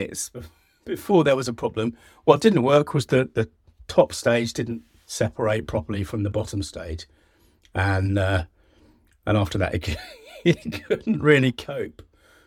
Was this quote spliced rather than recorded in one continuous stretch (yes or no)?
no